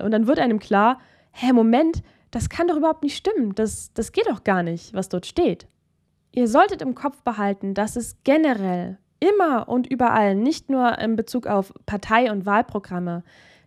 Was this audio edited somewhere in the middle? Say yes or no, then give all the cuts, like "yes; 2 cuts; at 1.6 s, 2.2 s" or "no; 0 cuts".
no; 0 cuts